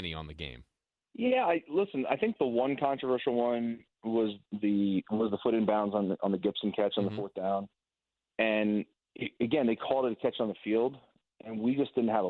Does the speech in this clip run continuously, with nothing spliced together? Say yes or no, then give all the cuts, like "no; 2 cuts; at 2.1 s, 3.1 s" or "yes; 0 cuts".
yes; 0 cuts